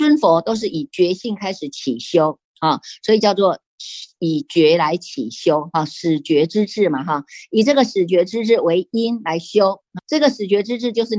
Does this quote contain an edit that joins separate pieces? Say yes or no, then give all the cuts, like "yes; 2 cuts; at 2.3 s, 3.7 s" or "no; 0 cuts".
yes; 1 cut; at 10.0 s